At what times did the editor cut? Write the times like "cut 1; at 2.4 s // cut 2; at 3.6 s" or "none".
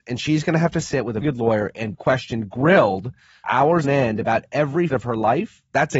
cut 1; at 1.2 s // cut 2; at 1.9 s // cut 3; at 3.4 s // cut 4; at 3.8 s // cut 5; at 4.9 s